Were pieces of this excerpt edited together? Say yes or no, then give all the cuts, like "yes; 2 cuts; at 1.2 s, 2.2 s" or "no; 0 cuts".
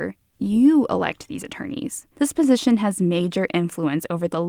yes; 1 cut; at 2.1 s